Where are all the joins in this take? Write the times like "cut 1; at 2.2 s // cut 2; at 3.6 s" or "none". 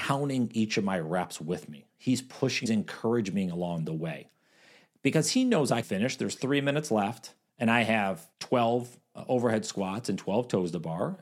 cut 1; at 2.7 s // cut 2; at 5.8 s // cut 3; at 7.5 s // cut 4; at 8.3 s